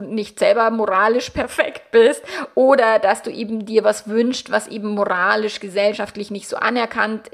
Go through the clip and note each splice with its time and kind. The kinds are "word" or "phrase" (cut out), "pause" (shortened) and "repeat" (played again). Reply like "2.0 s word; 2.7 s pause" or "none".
none